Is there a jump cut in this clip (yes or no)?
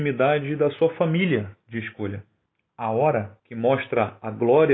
yes